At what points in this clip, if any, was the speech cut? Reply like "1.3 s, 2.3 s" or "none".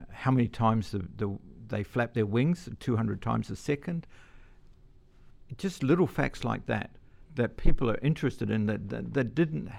7.3 s